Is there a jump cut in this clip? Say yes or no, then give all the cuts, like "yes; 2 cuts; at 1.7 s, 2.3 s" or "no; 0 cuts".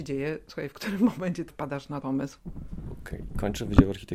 yes; 2 cuts; at 1.5 s, 2.0 s